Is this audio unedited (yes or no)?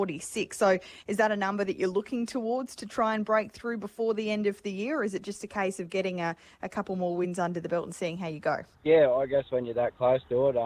no